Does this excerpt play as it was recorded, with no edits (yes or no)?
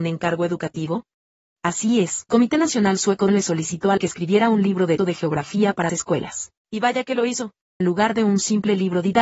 no